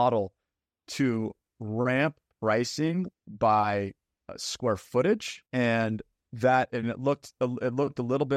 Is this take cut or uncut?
cut